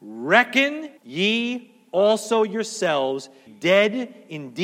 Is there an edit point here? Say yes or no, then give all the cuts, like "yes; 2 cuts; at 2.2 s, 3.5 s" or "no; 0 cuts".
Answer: yes; 2 cuts; at 1.0 s, 3.5 s